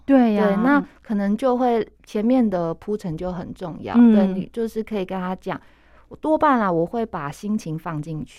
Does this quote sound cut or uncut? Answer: cut